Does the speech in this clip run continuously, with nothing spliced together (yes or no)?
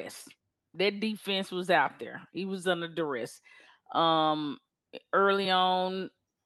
yes